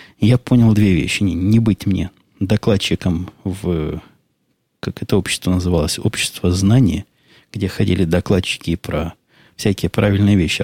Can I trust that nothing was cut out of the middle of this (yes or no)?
yes